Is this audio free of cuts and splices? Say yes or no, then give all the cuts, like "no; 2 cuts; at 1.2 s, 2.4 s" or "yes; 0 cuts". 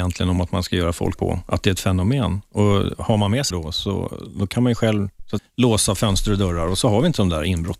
no; 3 cuts; at 1.2 s, 3.5 s, 5.4 s